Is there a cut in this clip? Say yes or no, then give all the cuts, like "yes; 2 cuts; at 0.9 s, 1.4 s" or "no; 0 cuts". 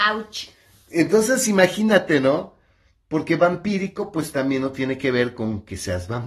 no; 0 cuts